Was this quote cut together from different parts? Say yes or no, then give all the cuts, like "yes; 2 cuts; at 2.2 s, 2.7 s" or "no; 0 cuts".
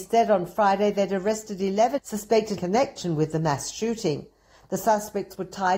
yes; 2 cuts; at 2.0 s, 2.6 s